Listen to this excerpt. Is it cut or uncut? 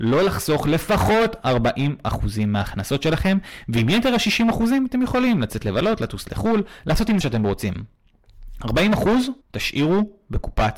cut